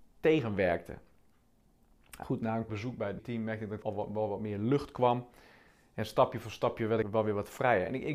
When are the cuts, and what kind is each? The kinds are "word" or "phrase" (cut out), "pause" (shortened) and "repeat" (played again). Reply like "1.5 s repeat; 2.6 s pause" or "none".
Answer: 2.2 s word; 2.7 s word; 3.2 s word; 3.8 s word; 7.0 s word